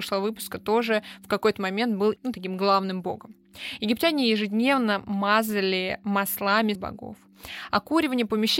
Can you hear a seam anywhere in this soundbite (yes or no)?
yes